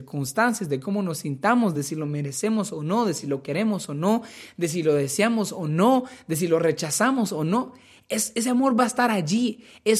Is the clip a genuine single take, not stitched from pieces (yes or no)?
yes